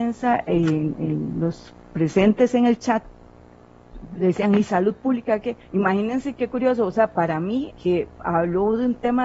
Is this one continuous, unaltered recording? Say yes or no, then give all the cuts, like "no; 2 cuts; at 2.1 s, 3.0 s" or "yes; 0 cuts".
no; 2 cuts; at 5.6 s, 7.7 s